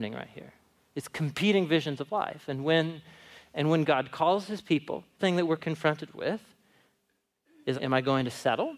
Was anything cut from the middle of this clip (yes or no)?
yes